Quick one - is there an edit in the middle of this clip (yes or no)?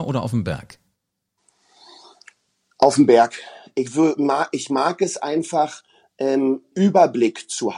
yes